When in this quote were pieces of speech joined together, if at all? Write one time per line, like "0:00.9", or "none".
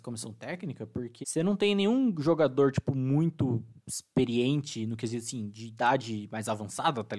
0:01.2